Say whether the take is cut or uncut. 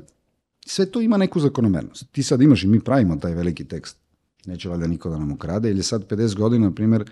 uncut